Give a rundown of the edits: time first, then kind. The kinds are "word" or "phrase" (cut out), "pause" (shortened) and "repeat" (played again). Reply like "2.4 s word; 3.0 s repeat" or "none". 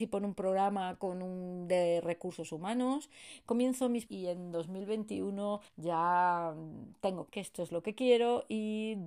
4.1 s phrase; 5.7 s pause; 7.3 s word